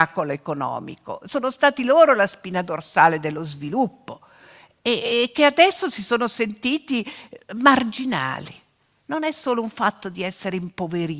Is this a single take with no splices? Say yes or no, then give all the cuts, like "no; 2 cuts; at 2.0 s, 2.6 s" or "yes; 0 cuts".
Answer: yes; 0 cuts